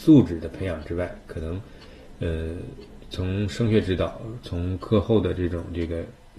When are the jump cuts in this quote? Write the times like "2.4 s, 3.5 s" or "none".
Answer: none